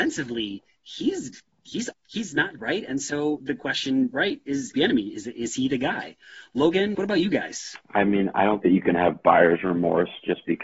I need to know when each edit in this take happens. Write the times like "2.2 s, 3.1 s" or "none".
1.9 s, 2.6 s, 3.4 s, 4.7 s, 6.9 s, 8.6 s